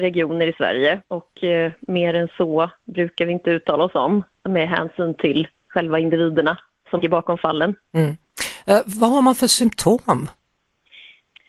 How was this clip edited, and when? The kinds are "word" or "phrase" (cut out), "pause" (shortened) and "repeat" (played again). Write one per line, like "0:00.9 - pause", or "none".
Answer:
0:01.0 - pause
0:07.0 - word